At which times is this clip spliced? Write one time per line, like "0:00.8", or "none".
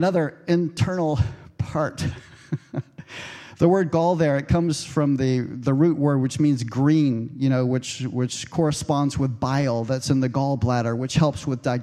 none

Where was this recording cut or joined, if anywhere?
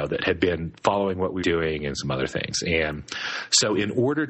0:01.4

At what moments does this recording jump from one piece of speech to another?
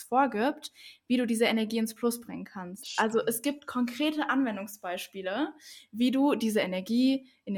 none

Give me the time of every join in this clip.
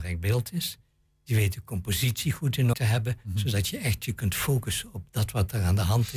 0:02.7

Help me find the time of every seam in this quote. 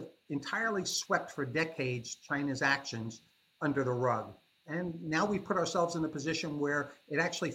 none

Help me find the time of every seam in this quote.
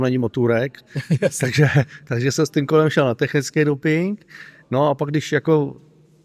none

